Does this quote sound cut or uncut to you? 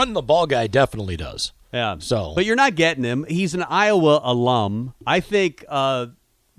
cut